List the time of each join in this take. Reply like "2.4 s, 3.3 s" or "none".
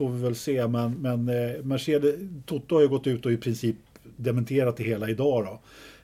none